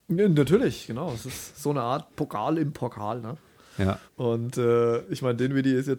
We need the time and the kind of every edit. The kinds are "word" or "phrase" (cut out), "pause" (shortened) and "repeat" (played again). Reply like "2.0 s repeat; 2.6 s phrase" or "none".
4.1 s pause